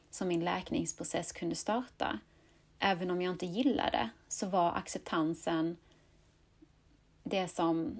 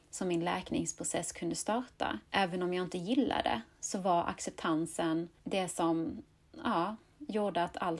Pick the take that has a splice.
second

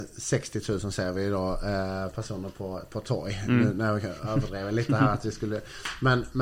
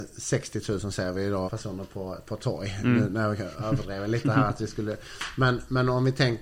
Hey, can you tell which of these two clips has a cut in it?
second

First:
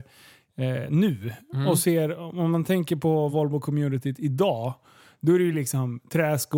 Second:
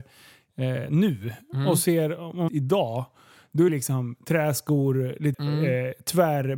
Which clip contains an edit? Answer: second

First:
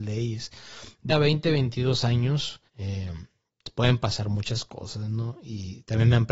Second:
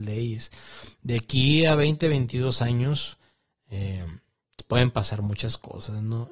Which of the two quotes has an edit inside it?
first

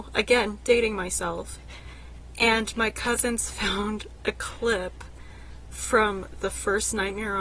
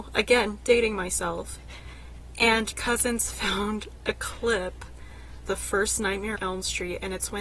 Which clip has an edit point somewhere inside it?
second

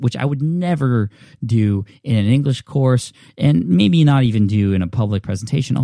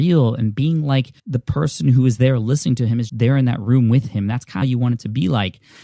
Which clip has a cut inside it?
second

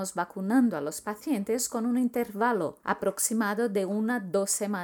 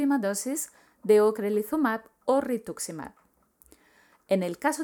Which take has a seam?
first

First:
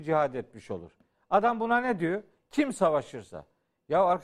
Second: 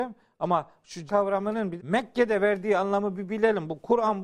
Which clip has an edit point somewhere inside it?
second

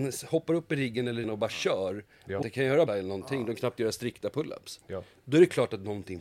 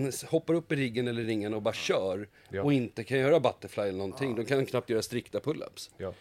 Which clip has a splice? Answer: first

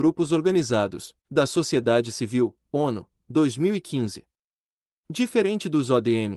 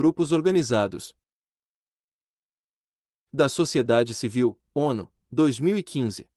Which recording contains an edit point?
first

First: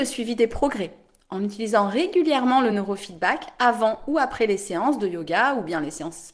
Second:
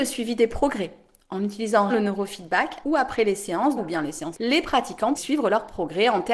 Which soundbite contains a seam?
second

